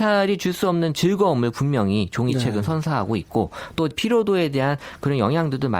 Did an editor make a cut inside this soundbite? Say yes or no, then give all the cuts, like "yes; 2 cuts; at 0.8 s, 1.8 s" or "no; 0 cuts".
yes; 1 cut; at 3.9 s